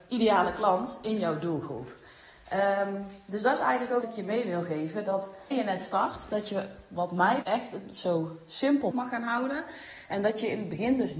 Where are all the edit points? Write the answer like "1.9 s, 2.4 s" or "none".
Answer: 4.0 s, 5.5 s, 7.4 s, 8.9 s